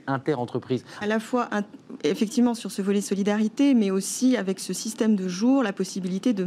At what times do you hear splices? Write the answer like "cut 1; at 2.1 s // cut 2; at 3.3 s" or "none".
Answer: cut 1; at 1.0 s

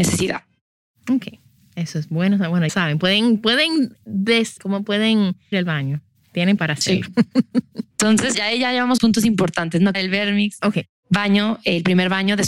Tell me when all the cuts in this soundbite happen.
cut 1; at 2.7 s // cut 2; at 4.6 s // cut 3; at 5.5 s // cut 4; at 6.6 s // cut 5; at 8.3 s // cut 6; at 9.0 s // cut 7; at 9.9 s

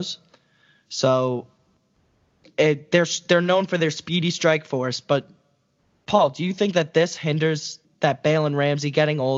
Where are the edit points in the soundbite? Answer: cut 1; at 7.8 s

